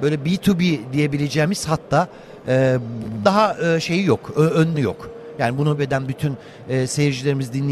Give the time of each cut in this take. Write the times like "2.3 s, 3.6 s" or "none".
3.2 s, 4.7 s, 5.8 s